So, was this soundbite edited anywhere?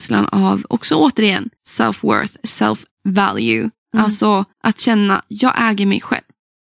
yes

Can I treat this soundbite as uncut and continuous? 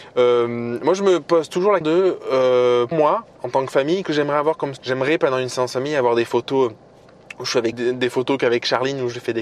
no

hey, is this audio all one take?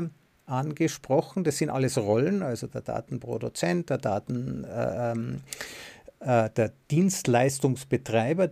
yes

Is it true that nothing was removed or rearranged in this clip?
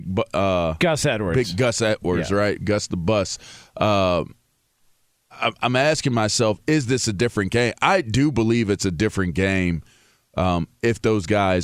yes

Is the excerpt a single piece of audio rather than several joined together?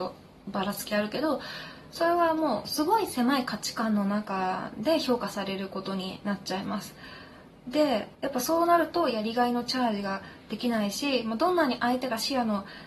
no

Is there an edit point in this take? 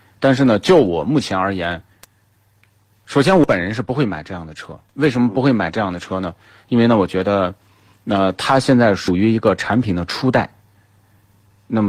yes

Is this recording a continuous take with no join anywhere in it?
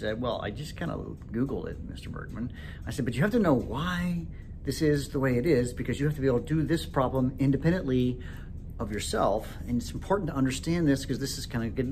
yes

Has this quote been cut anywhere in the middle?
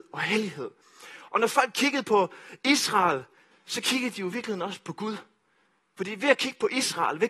no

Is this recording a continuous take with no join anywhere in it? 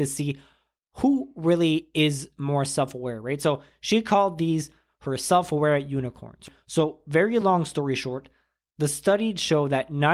yes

